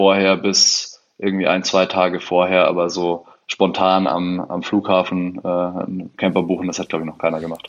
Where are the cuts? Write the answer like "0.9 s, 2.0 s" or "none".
none